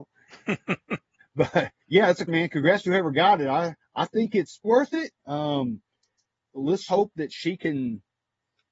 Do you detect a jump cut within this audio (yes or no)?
yes